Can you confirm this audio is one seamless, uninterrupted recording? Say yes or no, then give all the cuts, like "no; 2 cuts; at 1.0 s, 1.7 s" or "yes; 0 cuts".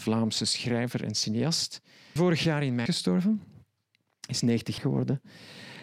no; 3 cuts; at 2.2 s, 2.9 s, 4.8 s